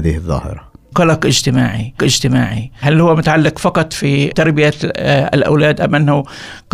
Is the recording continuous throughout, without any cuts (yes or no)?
no